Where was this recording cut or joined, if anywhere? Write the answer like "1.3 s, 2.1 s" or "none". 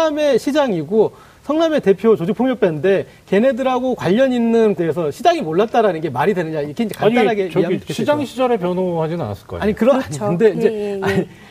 4.8 s